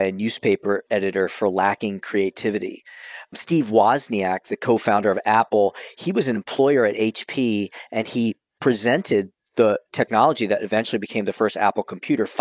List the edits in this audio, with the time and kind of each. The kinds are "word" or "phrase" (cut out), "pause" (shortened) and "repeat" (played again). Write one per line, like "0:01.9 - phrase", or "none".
none